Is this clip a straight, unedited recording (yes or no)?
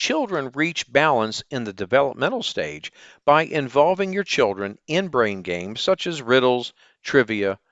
yes